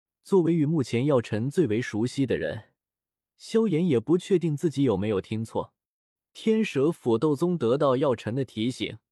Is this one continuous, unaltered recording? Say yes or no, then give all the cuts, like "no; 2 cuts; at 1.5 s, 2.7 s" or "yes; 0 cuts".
yes; 0 cuts